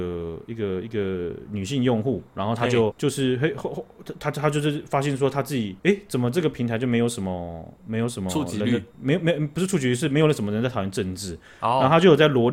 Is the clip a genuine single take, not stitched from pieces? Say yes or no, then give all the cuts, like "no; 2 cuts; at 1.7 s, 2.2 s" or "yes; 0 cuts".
no; 3 cuts; at 2.9 s, 5.8 s, 8.9 s